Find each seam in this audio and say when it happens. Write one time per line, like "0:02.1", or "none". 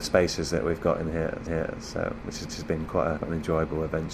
0:01.5
0:02.5
0:03.2